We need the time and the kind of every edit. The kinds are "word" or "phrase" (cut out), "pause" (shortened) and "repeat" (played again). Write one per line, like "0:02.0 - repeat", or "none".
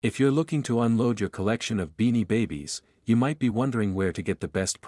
none